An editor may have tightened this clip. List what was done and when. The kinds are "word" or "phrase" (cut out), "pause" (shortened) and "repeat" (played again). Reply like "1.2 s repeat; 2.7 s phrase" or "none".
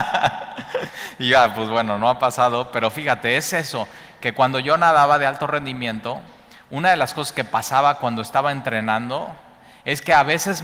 none